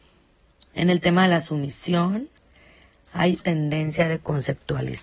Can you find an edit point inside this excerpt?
yes; 1 cut; at 3.4 s

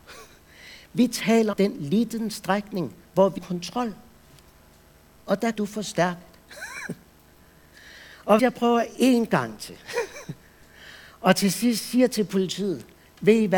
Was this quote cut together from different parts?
yes; 4 cuts; at 1.5 s, 3.4 s, 5.5 s, 8.4 s

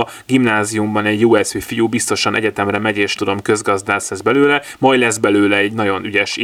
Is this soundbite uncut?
no; 1 cut; at 3.2 s

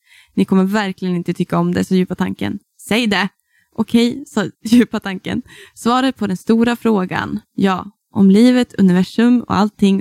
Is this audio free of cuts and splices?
yes; 0 cuts

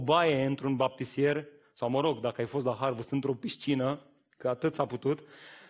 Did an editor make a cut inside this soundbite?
no; 0 cuts

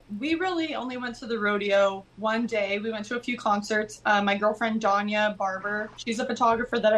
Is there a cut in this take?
yes; 2 cuts; at 2.1 s, 5.9 s

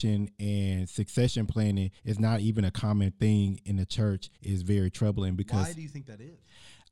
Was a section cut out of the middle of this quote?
yes; 2 cuts; at 2.0 s, 4.3 s

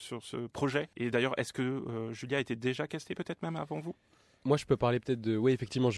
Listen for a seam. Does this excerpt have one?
no; 0 cuts

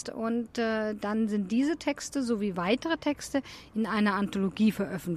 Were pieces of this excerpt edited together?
no; 0 cuts

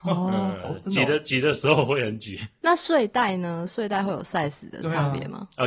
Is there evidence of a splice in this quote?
no; 0 cuts

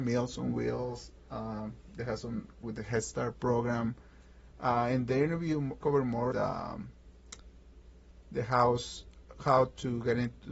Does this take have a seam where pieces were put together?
yes; 3 cuts; at 2.6 s, 5.8 s, 6.3 s

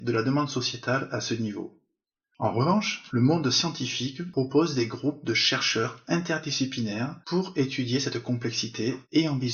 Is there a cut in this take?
no; 0 cuts

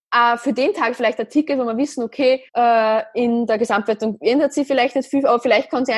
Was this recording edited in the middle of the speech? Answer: yes; 1 cut; at 2.5 s

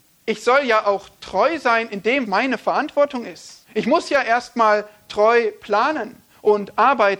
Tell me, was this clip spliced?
yes; 2 cuts; at 2.2 s, 3.6 s

